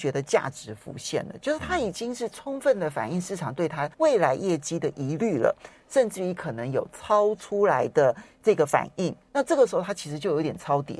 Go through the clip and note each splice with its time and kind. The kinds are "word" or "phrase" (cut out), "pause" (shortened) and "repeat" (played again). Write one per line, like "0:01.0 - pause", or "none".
0:03.9 - pause
0:09.2 - pause